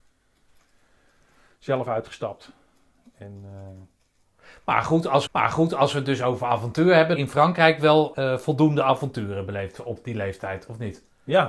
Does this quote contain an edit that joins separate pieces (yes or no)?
yes